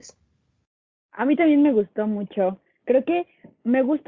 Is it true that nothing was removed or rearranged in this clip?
yes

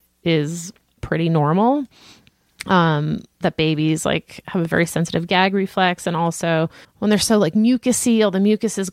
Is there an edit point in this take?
yes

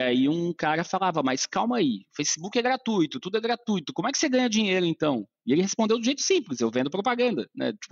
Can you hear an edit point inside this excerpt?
no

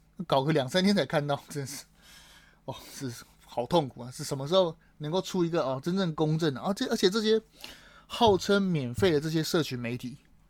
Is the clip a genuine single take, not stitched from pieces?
yes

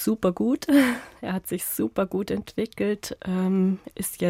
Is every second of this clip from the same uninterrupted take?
yes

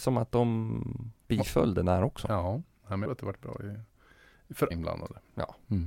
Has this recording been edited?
yes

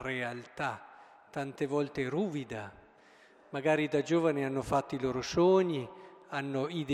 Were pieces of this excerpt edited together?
no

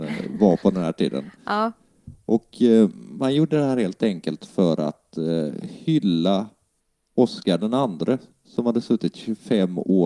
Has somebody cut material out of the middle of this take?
no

